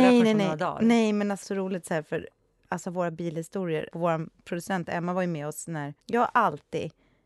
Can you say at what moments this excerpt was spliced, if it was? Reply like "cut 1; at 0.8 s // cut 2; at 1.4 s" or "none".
cut 1; at 1.4 s // cut 2; at 3.9 s // cut 3; at 6.0 s